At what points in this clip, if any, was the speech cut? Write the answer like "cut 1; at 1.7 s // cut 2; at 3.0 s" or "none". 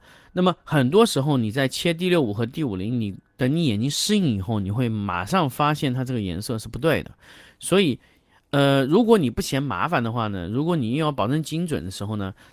none